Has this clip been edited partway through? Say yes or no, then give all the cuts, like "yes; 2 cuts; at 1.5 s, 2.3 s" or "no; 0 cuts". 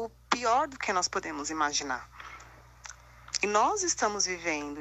no; 0 cuts